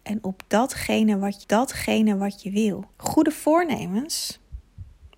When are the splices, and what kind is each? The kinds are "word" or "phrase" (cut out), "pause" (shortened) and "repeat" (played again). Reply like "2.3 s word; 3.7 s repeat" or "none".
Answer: 1.4 s repeat; 2.9 s pause